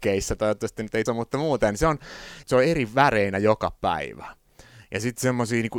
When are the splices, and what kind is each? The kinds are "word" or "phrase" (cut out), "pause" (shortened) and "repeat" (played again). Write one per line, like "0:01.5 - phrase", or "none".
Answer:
0:01.1 - word
0:02.4 - phrase